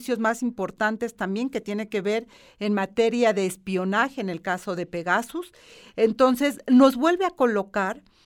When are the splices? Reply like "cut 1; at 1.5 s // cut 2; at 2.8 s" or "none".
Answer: none